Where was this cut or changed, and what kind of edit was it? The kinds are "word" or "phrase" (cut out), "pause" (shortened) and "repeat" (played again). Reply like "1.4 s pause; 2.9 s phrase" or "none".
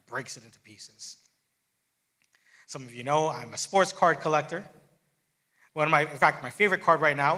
none